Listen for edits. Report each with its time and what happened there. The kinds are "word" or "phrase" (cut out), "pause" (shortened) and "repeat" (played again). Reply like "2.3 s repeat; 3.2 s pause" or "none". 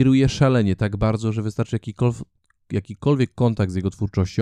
none